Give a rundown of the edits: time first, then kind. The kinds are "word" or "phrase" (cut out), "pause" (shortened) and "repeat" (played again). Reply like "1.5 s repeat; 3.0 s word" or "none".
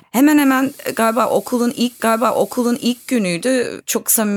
2.0 s repeat